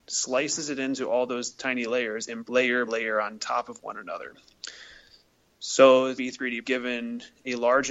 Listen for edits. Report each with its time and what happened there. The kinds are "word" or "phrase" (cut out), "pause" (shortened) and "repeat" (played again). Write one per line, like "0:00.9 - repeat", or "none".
0:02.4 - phrase
0:02.9 - word
0:06.2 - phrase
0:06.6 - word